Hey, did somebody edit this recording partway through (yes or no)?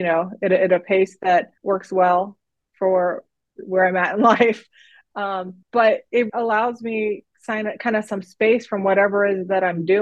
yes